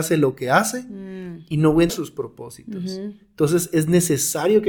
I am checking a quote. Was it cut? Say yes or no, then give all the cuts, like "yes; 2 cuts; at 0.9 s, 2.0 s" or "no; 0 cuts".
yes; 1 cut; at 1.9 s